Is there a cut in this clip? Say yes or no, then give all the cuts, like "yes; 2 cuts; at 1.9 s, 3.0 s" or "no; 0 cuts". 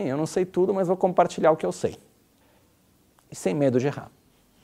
no; 0 cuts